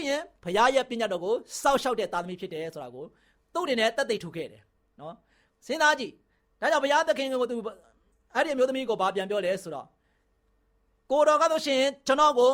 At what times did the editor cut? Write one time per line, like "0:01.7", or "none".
none